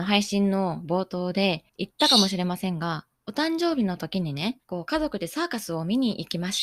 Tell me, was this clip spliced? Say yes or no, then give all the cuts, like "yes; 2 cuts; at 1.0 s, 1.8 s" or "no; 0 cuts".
yes; 3 cuts; at 1.7 s, 3.1 s, 4.6 s